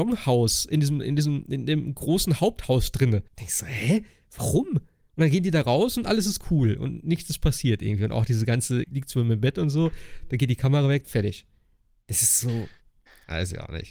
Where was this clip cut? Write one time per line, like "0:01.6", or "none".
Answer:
0:03.3
0:08.8
0:11.0